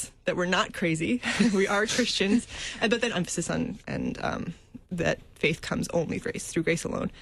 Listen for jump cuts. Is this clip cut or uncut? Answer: cut